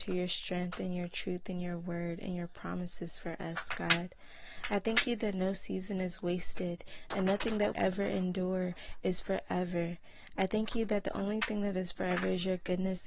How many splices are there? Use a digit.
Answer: 1